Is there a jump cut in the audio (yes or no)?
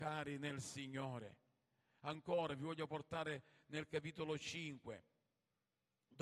no